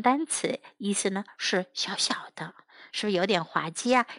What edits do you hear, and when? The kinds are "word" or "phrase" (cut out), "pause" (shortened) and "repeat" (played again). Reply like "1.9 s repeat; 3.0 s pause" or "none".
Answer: none